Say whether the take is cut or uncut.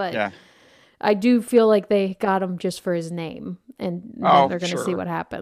uncut